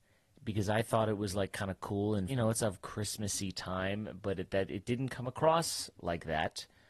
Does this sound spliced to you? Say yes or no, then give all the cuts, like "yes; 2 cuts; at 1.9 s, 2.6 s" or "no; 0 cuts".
yes; 1 cut; at 2.3 s